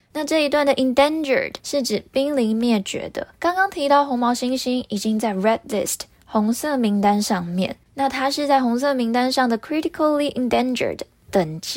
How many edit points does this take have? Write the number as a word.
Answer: three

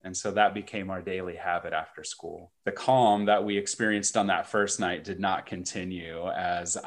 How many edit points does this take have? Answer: one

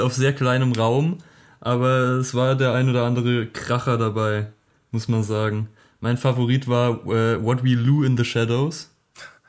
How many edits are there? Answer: zero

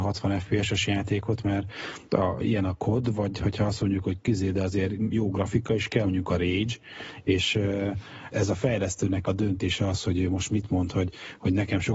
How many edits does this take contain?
four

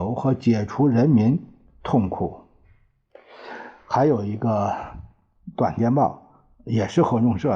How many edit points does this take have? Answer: zero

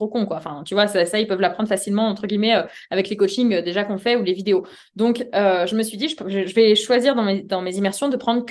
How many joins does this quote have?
zero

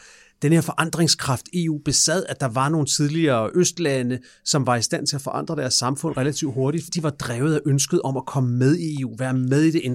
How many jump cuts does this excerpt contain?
one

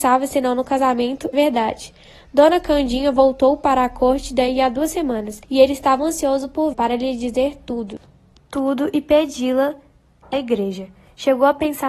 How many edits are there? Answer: five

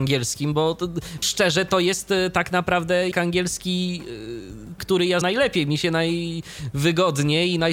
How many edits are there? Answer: four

